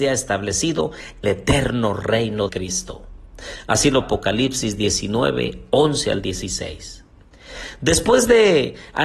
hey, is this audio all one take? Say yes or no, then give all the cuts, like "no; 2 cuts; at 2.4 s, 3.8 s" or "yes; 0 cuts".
no; 3 cuts; at 1.2 s, 2.5 s, 4.0 s